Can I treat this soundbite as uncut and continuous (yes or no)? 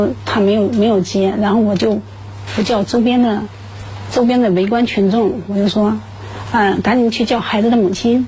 yes